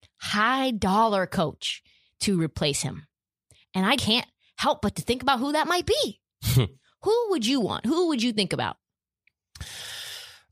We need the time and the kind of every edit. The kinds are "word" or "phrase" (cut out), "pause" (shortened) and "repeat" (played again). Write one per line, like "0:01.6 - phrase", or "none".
0:04.0 - word